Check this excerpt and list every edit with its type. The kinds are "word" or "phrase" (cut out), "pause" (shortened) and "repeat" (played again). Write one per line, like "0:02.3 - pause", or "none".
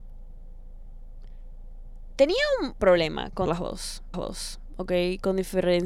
0:02.8 - word
0:03.5 - word
0:04.1 - repeat